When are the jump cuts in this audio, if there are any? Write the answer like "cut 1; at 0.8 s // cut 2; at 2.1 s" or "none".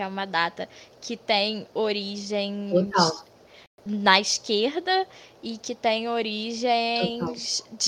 none